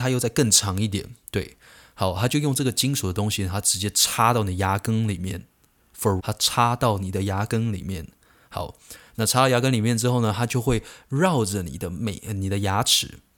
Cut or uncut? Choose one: cut